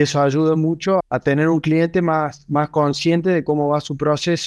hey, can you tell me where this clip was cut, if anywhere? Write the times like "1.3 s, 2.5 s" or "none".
1.0 s